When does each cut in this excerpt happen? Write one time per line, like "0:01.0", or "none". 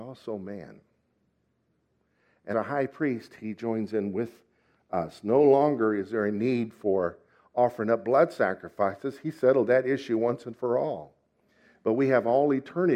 0:02.5

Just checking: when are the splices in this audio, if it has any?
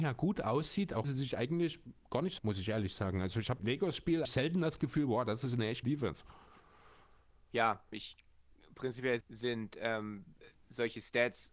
0:01.0
0:02.4
0:03.6
0:04.2
0:05.8
0:07.9
0:09.2

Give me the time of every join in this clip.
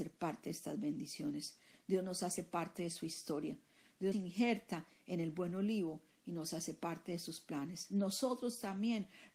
0:04.1

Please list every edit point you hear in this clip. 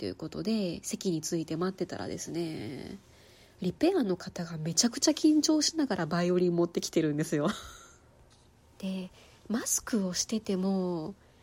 none

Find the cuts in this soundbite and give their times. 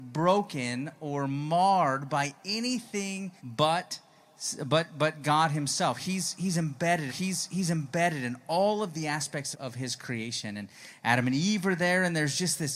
0:03.4
0:07.1
0:09.5

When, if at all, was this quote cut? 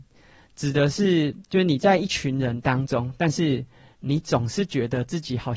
none

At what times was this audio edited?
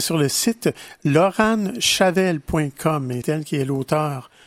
0:03.2

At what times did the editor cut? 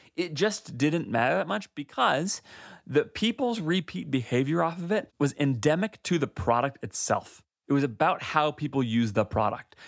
none

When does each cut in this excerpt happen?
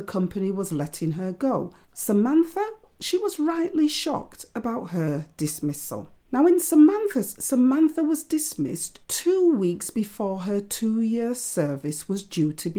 0:01.8
0:06.2
0:07.3
0:09.0

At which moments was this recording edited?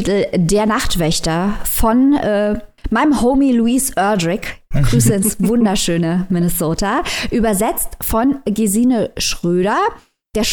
0:04.6

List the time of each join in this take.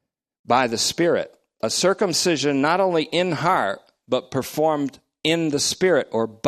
none

